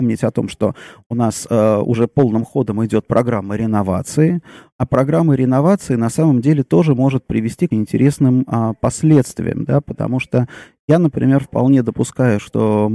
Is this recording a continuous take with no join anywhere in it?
no; 1 cut; at 7.7 s

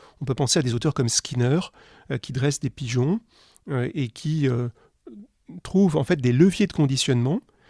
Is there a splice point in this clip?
no; 0 cuts

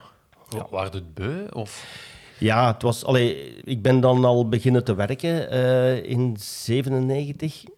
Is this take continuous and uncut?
no; 1 cut; at 3.6 s

